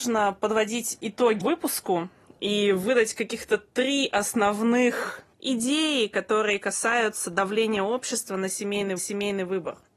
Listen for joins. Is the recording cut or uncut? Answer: cut